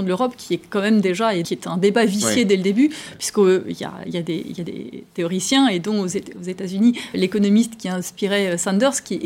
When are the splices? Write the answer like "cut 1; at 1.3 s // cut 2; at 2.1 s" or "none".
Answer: cut 1; at 1.4 s // cut 2; at 7.1 s